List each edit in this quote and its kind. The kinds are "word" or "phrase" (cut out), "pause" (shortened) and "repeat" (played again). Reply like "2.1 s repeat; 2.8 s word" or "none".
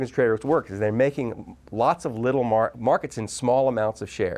none

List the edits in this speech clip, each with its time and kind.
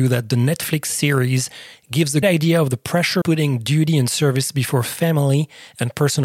2.2 s word; 3.2 s word

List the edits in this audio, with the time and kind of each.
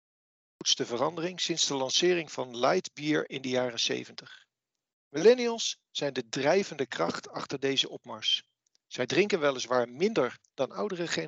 none

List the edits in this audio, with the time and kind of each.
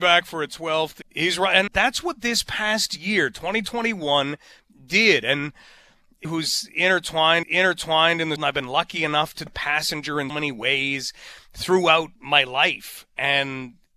1.0 s phrase; 1.7 s word; 6.2 s phrase; 7.4 s repeat; 8.4 s phrase; 9.5 s phrase; 10.3 s word; 12.2 s pause

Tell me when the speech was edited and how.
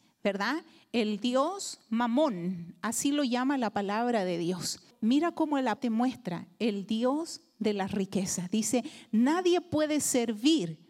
4.9 s pause; 5.8 s word

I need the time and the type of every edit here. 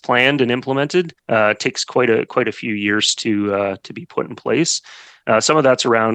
1.2 s pause

